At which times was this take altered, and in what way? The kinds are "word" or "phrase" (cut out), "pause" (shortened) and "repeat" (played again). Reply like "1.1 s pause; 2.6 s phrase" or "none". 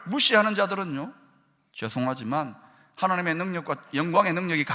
none